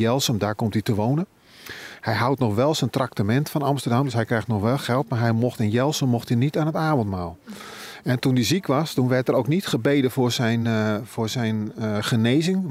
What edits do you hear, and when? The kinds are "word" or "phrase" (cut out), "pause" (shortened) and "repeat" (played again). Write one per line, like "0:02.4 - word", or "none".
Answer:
none